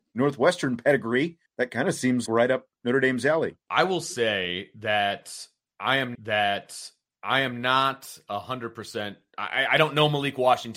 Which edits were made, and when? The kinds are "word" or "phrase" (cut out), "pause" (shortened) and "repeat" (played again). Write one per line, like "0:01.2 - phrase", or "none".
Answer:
0:01.5 - pause
0:02.3 - word
0:03.6 - pause
0:06.1 - repeat